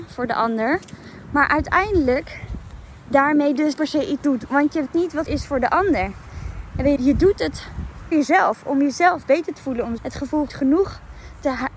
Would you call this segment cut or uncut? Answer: cut